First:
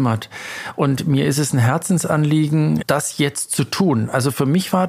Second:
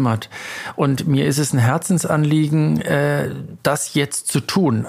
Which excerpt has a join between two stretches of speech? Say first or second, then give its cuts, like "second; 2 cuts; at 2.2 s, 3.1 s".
first; 1 cut; at 2.8 s